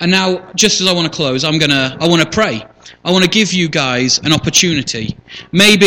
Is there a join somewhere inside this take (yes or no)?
no